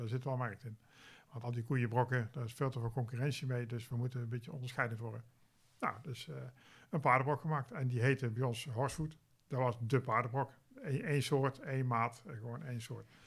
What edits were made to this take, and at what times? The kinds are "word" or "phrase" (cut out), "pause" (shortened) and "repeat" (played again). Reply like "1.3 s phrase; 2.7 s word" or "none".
1.4 s word